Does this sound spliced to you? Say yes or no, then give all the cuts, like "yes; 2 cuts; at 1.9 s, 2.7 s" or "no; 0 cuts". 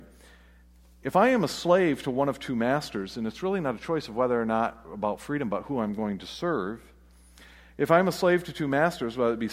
no; 0 cuts